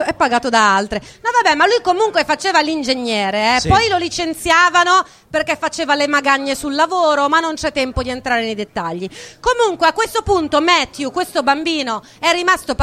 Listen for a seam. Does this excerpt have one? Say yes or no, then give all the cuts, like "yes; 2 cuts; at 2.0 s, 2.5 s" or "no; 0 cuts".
no; 0 cuts